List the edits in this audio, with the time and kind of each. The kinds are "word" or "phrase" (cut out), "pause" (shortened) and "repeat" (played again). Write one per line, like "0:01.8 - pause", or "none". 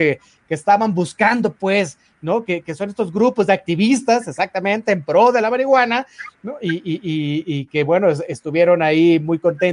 none

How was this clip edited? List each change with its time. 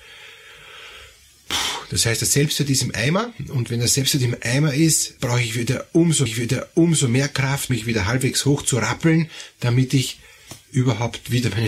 0:05.2 - word
0:06.3 - repeat
0:07.7 - word

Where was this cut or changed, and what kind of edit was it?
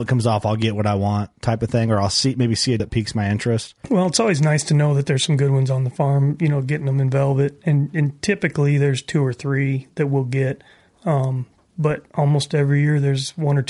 0:02.8 - word
0:12.1 - pause

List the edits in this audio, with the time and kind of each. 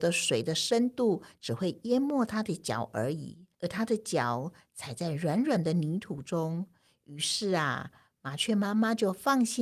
0:03.5 - pause

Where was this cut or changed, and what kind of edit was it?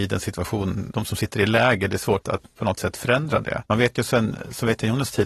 0:00.9 - word
0:02.2 - word
0:03.7 - pause

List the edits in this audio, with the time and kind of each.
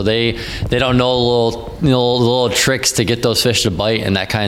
none

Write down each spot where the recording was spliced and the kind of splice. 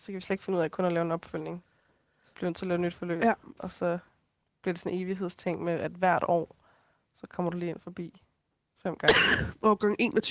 none

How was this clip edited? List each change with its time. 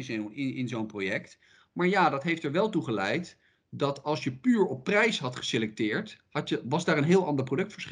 none

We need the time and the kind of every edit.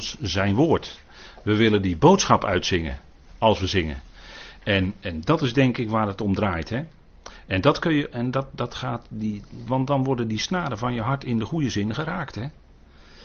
0:09.7 - word

